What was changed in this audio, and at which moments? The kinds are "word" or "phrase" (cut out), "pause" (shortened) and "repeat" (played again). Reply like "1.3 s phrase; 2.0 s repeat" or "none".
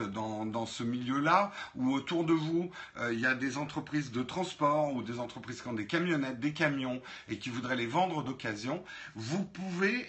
none